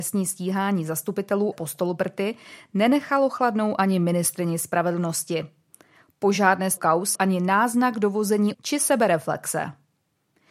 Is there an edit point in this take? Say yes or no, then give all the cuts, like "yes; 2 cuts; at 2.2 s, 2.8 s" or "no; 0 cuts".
yes; 4 cuts; at 1.5 s, 6.8 s, 7.1 s, 8.5 s